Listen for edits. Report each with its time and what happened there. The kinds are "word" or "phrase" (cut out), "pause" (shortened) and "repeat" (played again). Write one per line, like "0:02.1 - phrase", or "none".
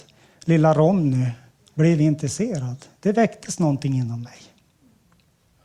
none